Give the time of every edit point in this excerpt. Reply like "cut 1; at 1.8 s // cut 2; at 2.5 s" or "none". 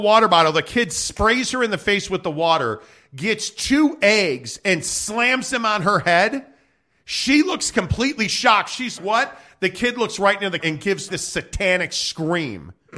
cut 1; at 9.0 s // cut 2; at 10.6 s // cut 3; at 11.1 s